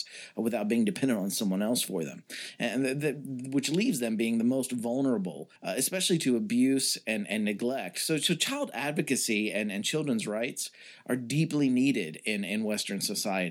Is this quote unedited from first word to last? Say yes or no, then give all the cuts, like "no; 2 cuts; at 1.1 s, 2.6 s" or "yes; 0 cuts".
no; 1 cut; at 5.6 s